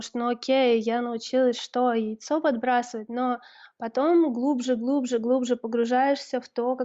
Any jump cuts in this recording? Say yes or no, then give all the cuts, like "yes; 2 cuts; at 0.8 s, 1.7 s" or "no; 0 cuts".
no; 0 cuts